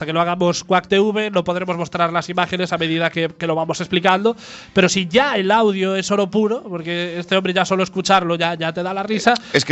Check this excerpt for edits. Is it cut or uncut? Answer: uncut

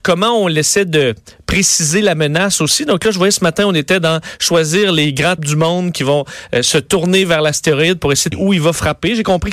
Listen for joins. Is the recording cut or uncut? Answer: cut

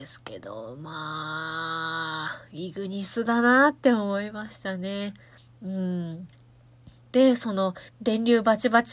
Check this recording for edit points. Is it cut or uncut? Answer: cut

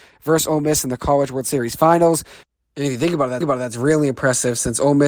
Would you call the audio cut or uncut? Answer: cut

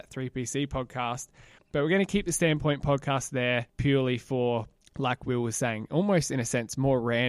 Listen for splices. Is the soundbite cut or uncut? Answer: cut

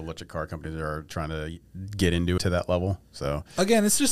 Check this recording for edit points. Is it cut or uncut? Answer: cut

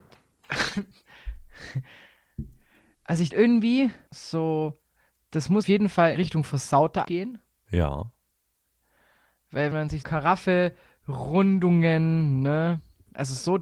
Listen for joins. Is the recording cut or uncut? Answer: cut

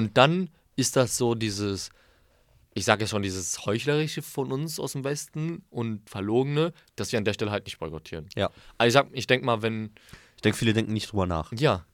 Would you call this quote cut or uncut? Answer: uncut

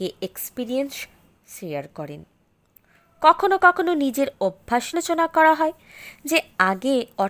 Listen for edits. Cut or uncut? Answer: cut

